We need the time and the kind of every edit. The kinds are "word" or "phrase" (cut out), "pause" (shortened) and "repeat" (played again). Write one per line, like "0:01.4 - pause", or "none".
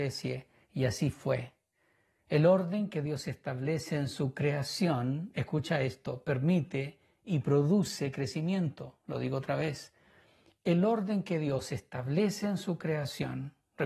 none